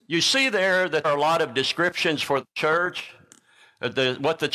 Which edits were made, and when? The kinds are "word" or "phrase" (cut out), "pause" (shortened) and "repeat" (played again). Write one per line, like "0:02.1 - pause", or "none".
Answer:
0:01.0 - word